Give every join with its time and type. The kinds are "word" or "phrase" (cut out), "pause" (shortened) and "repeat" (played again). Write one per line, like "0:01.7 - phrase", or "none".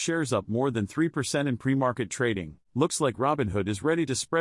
0:02.6 - pause